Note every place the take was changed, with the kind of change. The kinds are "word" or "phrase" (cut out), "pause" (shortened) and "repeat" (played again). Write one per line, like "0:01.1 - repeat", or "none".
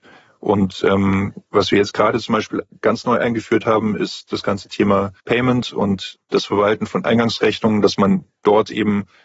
0:01.5 - pause
0:05.2 - pause

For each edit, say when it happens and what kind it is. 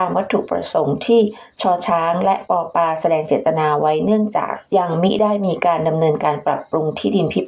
0:04.7 - pause

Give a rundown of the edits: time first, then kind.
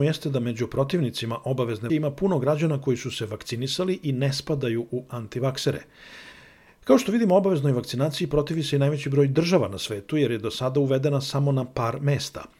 0:01.9 - word

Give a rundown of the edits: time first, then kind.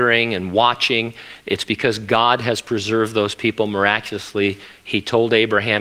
none

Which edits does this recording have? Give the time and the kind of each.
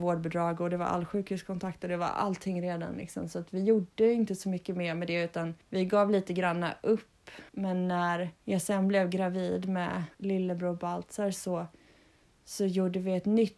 0:05.6 - pause
0:07.5 - pause
0:08.4 - pause
0:10.1 - pause

